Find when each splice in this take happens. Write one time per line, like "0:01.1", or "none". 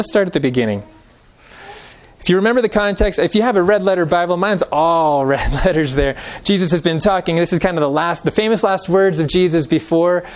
none